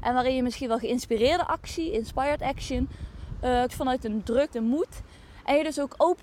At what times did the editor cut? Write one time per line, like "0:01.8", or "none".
0:03.7
0:04.5